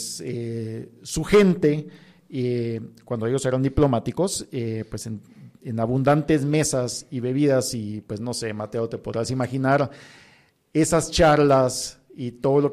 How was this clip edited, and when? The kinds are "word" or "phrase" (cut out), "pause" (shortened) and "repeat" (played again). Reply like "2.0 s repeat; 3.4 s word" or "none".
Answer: none